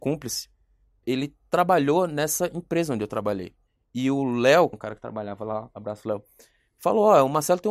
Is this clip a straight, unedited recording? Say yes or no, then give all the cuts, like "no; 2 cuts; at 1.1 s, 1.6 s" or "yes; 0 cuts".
no; 3 cuts; at 1.0 s, 3.7 s, 4.7 s